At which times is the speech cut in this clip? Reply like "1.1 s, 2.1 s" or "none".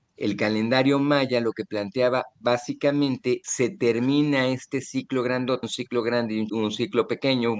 3.4 s, 5.6 s, 6.5 s